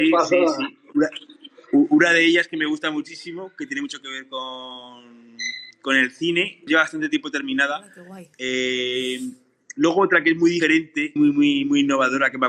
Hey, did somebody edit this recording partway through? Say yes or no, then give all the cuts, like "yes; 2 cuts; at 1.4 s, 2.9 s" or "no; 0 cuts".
yes; 2 cuts; at 6.7 s, 11.2 s